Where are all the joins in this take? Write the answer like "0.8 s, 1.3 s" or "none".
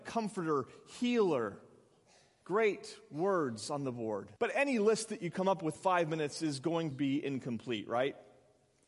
4.4 s, 5.8 s, 6.9 s